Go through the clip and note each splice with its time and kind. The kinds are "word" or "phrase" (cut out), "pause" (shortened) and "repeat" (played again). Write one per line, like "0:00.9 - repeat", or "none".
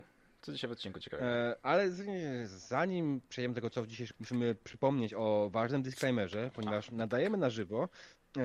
0:04.1 - word